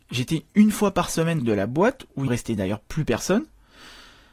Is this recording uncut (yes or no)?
no